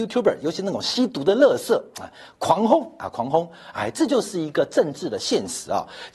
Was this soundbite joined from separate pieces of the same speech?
no; 0 cuts

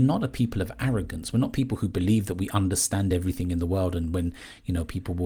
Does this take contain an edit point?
no; 0 cuts

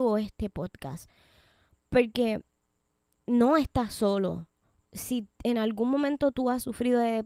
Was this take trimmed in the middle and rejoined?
no; 0 cuts

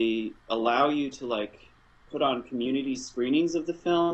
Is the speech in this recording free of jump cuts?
yes; 0 cuts

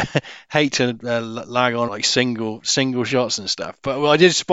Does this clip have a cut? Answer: yes; 1 cut; at 1.9 s

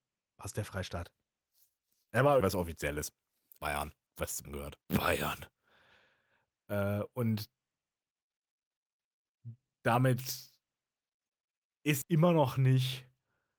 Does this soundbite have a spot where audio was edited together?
yes; 6 cuts; at 2.4 s, 3.6 s, 4.1 s, 4.4 s, 4.8 s, 12.0 s

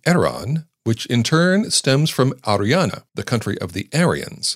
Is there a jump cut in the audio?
yes; 1 cut; at 3.1 s

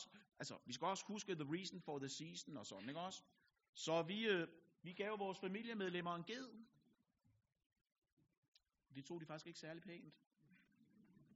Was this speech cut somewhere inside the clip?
no; 0 cuts

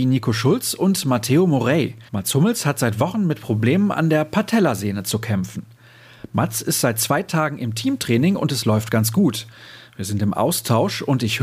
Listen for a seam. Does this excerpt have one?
yes; 1 cut; at 2.1 s

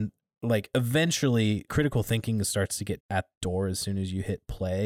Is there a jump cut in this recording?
yes; 3 cuts; at 1.7 s, 3.0 s, 3.3 s

